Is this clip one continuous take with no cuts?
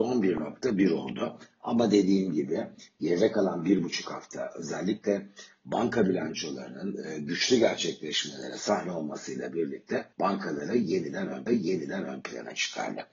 no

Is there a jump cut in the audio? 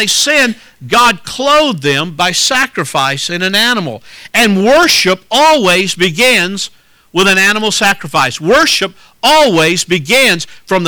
no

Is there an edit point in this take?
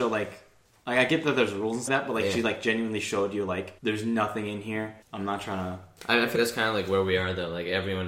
yes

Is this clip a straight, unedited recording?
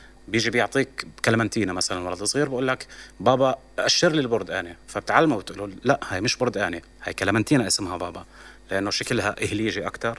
no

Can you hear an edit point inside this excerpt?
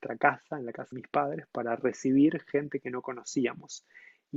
yes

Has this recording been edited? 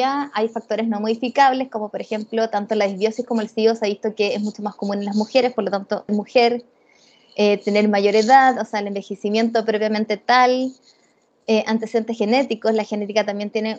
yes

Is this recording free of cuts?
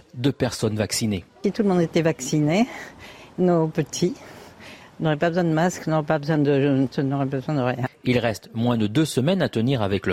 no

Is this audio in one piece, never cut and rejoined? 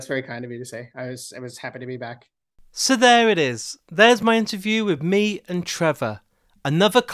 yes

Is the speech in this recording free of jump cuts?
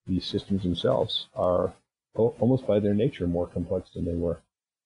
yes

